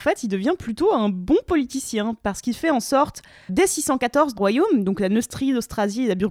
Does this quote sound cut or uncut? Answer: cut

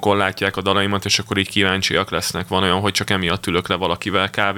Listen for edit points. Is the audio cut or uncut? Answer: uncut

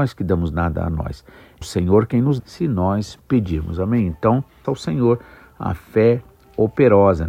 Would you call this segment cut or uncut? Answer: cut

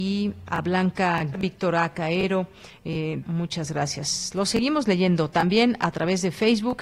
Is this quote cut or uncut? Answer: cut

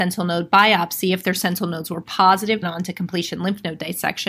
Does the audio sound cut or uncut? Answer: cut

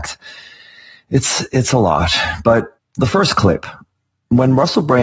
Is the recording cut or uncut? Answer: cut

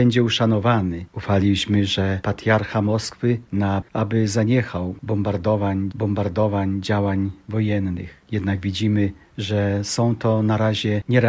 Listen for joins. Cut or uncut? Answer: cut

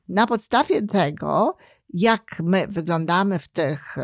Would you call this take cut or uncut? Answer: uncut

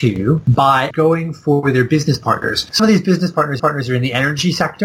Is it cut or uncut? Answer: cut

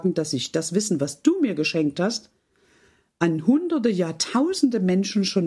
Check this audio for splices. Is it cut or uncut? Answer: uncut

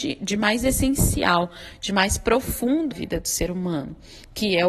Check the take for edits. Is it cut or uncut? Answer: cut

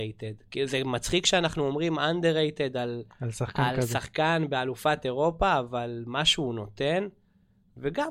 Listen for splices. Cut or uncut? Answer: uncut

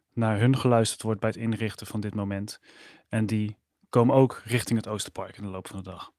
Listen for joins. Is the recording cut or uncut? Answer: uncut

